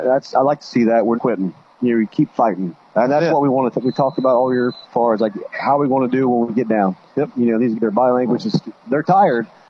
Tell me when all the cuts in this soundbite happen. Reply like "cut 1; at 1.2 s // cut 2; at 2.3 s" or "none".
cut 1; at 1.1 s // cut 2; at 4.9 s // cut 3; at 7.7 s